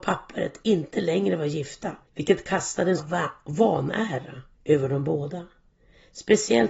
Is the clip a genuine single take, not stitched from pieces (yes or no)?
no